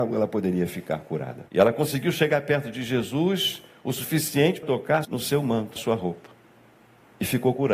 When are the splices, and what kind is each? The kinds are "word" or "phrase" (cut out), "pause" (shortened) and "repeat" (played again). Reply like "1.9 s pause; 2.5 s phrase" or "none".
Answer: 1.5 s pause; 4.6 s word; 5.0 s word; 5.8 s word